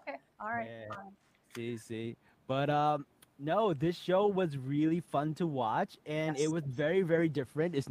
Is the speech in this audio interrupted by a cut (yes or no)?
no